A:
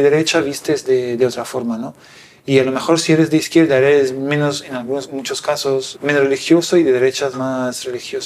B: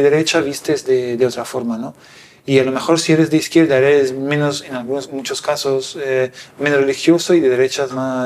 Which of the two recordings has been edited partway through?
A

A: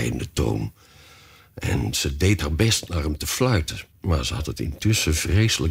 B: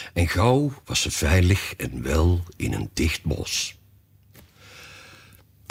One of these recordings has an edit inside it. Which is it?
A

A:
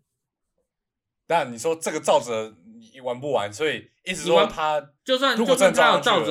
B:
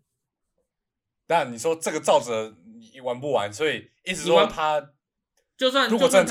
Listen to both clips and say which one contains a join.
A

